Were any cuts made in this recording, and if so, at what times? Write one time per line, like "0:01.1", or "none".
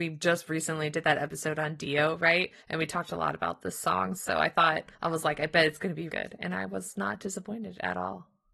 0:02.6
0:04.9
0:06.1